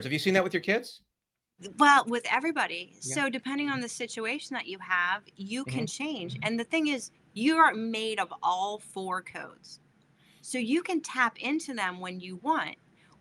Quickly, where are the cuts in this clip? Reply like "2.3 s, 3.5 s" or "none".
none